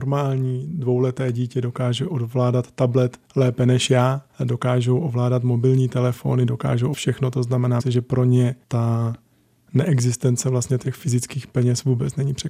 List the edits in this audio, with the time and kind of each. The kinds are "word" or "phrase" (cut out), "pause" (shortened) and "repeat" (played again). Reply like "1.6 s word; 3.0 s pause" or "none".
3.2 s pause; 4.3 s pause; 6.9 s word; 7.8 s word; 8.6 s pause